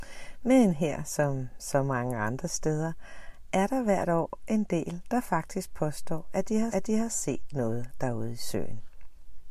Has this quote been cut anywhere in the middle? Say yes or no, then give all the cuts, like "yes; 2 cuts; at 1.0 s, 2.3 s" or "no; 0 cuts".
yes; 1 cut; at 6.7 s